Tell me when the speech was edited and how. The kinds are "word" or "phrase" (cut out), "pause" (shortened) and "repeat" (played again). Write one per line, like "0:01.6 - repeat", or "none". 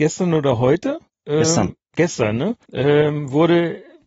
0:01.1 - pause
0:02.6 - pause